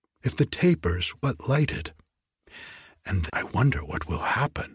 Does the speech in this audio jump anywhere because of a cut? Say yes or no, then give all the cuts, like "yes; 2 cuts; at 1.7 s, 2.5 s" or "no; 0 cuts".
yes; 2 cuts; at 1.1 s, 3.3 s